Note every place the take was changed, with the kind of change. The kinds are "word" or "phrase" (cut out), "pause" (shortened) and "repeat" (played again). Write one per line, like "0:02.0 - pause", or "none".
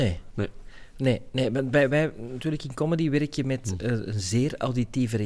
none